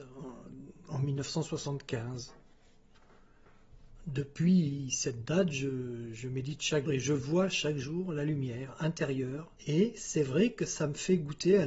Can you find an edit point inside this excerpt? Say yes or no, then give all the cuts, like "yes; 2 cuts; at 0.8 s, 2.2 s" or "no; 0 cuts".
yes; 2 cuts; at 6.9 s, 9.6 s